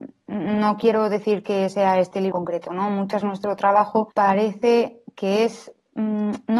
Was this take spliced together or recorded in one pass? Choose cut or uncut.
cut